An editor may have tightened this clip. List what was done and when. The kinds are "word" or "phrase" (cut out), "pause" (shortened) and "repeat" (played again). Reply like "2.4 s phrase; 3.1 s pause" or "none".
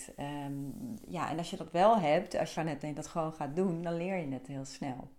2.6 s phrase

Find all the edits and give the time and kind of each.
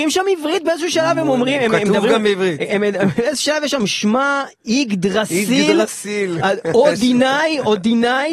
none

